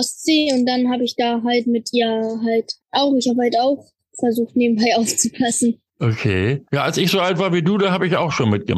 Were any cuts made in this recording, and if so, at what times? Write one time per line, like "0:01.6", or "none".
0:02.8
0:06.7